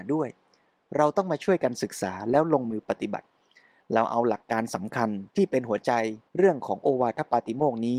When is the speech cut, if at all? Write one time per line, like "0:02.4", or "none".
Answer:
0:05.3
0:06.3